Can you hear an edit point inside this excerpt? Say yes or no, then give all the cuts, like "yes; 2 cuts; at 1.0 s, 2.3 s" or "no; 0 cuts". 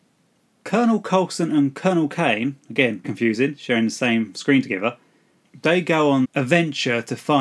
yes; 2 cuts; at 3.0 s, 6.2 s